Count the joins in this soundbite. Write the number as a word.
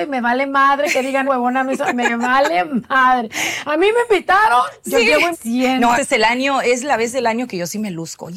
three